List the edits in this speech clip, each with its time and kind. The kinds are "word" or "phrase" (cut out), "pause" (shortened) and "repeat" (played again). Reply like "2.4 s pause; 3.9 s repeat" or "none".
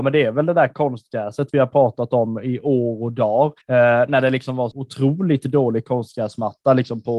3.6 s pause; 4.7 s word